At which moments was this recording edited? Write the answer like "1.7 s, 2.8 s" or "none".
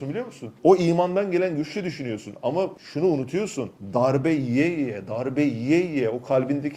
none